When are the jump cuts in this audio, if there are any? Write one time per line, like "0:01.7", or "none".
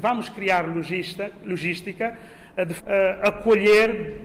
0:02.8